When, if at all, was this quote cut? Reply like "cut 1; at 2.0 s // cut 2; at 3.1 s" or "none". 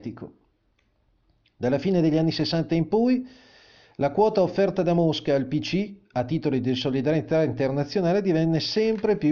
none